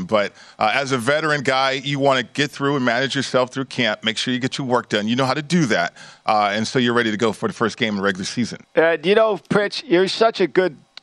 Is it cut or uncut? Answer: cut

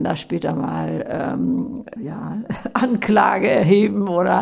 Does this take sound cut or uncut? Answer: cut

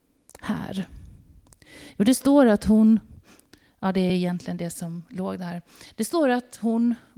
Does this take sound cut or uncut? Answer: uncut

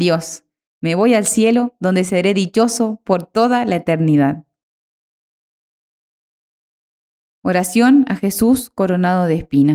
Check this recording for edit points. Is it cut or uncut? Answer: uncut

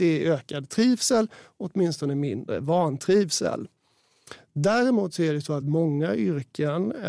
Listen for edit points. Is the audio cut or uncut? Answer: uncut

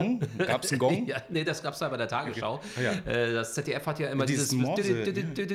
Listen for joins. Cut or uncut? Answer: uncut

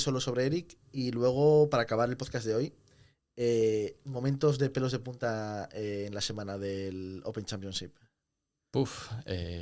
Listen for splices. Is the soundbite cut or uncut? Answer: uncut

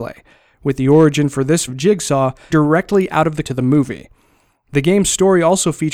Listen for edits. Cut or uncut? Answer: cut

